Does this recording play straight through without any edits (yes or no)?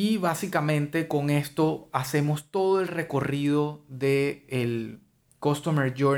yes